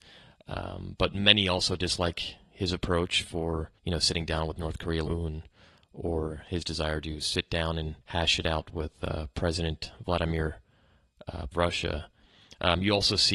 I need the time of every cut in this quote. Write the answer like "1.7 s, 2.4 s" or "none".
3.8 s, 5.1 s, 8.0 s, 11.5 s